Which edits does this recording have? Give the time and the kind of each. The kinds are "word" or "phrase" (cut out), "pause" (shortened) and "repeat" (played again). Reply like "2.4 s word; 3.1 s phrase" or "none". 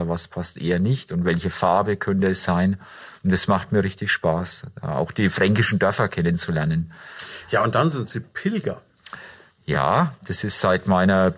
none